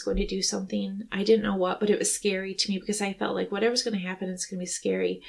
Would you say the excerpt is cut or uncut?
uncut